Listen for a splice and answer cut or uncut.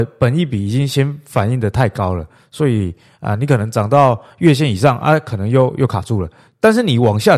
uncut